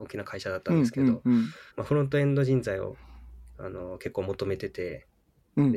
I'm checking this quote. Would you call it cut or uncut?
cut